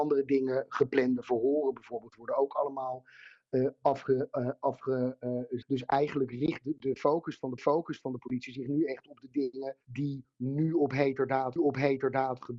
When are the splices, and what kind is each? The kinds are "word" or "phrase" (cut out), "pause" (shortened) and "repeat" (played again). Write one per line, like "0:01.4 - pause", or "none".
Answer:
0:05.6 - word
0:07.6 - repeat
0:09.8 - pause
0:11.6 - repeat